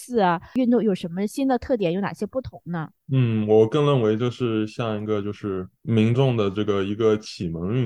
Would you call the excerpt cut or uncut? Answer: cut